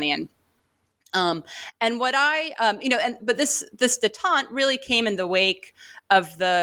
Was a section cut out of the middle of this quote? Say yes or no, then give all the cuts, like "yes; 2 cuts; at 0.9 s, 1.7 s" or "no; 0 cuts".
yes; 1 cut; at 3.2 s